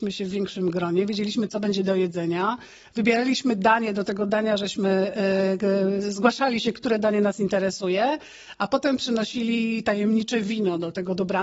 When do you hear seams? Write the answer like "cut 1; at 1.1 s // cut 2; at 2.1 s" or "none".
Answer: none